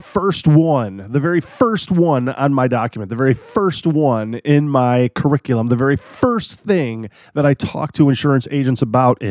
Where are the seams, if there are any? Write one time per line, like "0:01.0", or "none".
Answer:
none